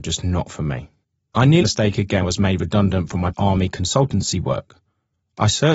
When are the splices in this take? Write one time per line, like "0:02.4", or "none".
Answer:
0:01.0
0:01.6
0:02.2
0:03.3

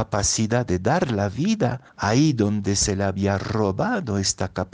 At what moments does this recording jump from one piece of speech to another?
0:01.9

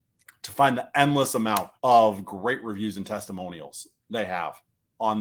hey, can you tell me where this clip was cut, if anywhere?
0:01.8

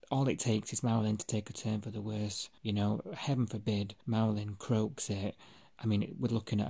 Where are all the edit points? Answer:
0:02.6
0:04.0

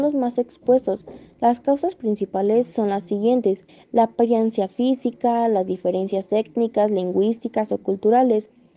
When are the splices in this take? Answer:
0:03.7

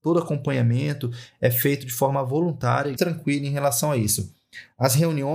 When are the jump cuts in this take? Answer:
0:03.0

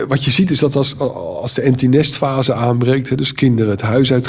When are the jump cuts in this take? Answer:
none

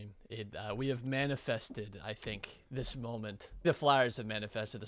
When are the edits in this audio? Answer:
0:03.6

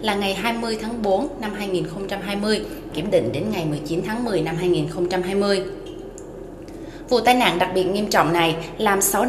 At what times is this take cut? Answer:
0:02.9

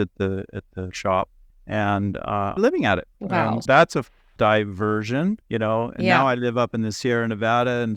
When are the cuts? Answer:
0:00.9
0:01.5
0:02.6
0:03.1
0:03.7
0:04.4
0:05.4

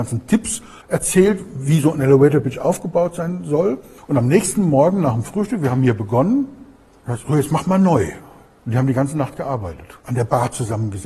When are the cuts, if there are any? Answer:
none

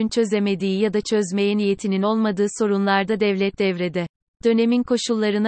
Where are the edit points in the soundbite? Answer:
none

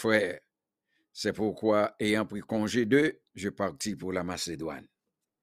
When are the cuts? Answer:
0:03.3

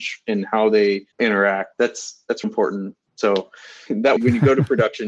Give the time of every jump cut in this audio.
0:01.1
0:02.4
0:03.9
0:04.2

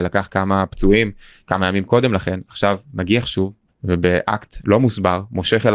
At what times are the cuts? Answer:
0:03.7

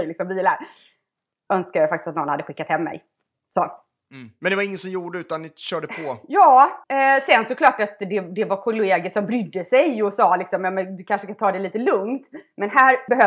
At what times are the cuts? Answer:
0:03.4
0:06.8

